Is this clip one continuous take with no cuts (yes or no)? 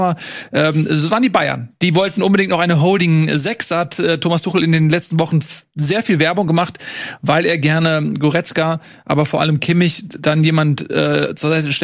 yes